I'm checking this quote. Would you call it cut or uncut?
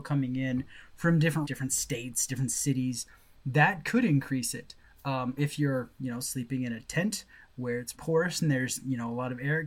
cut